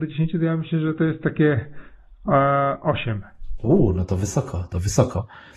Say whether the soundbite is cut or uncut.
uncut